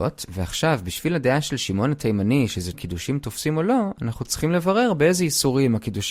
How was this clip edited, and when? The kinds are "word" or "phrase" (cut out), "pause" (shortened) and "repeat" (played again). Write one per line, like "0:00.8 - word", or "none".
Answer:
0:02.7 - phrase